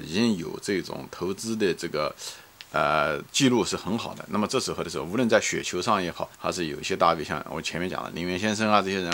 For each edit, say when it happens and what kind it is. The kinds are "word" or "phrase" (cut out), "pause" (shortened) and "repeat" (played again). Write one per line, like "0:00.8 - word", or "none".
0:06.3 - pause